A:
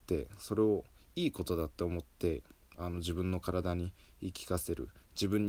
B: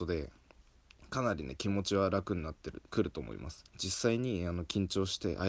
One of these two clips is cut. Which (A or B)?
B